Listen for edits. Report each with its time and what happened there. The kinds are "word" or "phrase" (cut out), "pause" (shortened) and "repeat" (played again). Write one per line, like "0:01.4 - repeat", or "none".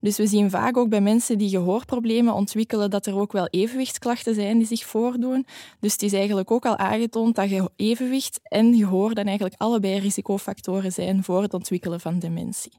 none